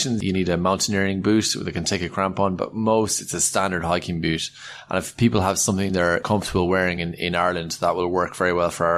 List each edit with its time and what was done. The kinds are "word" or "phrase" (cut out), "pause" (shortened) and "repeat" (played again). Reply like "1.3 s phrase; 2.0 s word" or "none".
none